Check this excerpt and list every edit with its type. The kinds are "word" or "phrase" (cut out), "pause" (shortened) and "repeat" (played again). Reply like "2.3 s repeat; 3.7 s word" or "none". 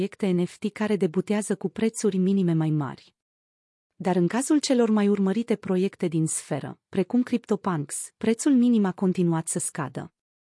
none